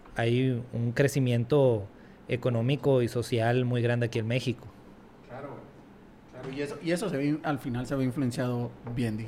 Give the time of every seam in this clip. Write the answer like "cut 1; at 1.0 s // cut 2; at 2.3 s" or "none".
none